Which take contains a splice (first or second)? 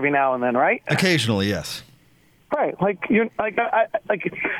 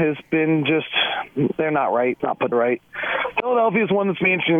second